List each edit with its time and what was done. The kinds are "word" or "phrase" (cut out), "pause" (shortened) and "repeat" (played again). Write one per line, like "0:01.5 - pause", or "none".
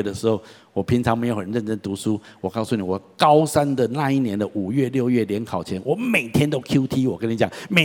none